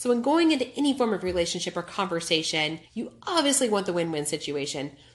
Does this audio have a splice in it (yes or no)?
yes